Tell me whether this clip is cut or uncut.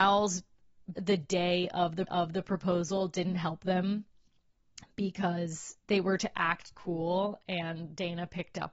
cut